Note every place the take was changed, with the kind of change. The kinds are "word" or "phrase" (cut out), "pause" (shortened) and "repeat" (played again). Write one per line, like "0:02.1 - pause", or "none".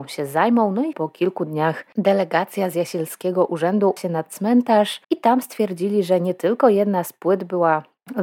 0:00.9 - word
0:04.0 - word
0:05.0 - pause